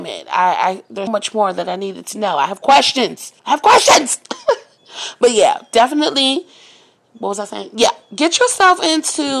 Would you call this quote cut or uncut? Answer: cut